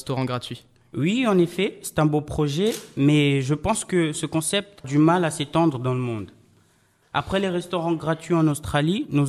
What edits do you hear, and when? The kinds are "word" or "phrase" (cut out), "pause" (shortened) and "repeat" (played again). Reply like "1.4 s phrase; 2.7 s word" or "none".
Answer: 4.8 s word